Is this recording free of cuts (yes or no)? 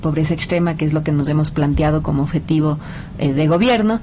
yes